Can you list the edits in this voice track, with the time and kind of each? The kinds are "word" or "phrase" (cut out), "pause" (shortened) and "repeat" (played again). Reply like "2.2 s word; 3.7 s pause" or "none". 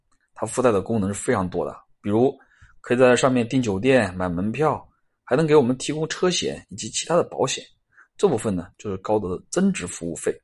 none